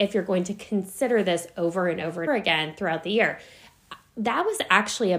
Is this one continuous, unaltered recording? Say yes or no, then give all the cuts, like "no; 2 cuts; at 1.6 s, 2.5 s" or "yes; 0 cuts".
no; 1 cut; at 2.3 s